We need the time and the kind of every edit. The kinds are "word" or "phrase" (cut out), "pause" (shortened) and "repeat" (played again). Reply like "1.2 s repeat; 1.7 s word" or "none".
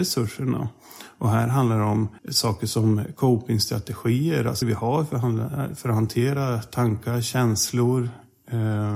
2.2 s pause; 4.6 s word